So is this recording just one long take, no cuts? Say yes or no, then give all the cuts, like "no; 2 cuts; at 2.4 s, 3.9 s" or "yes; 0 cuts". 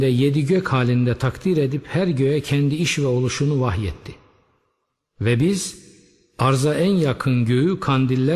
yes; 0 cuts